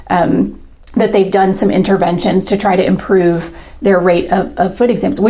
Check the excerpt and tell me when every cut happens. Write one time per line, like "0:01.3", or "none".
none